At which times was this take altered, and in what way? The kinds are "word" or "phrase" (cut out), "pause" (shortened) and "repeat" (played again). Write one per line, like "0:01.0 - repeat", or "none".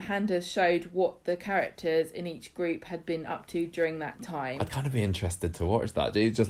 none